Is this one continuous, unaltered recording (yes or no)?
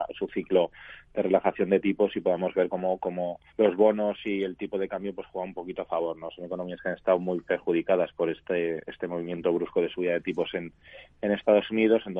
no